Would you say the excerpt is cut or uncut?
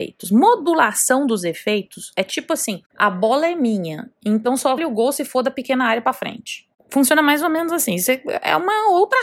cut